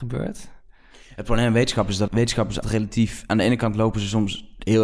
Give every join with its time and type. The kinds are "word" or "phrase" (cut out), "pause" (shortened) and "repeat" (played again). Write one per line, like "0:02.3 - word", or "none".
0:02.1 - word
0:02.6 - word